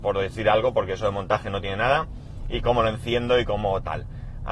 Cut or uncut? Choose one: uncut